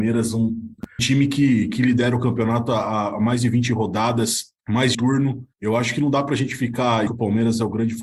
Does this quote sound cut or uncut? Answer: cut